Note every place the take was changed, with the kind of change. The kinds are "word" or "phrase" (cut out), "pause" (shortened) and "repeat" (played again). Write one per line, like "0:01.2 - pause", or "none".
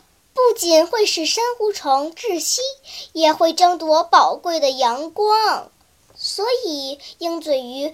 none